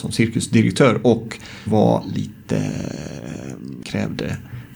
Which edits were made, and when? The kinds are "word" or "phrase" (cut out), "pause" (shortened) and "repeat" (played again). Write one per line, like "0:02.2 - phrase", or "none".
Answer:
0:01.7 - phrase
0:03.8 - phrase